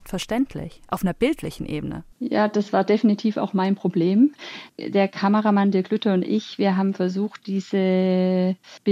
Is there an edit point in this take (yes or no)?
yes